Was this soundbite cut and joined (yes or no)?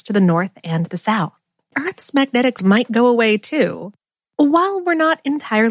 yes